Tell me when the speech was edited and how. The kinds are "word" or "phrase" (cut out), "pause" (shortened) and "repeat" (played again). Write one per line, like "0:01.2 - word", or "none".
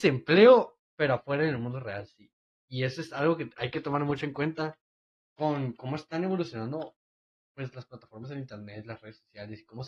none